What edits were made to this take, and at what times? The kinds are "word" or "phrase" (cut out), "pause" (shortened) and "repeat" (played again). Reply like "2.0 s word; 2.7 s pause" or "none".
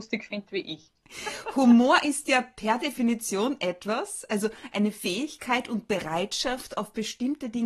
none